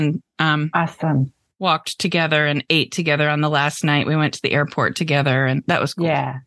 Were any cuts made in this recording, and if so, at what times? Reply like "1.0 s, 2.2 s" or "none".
none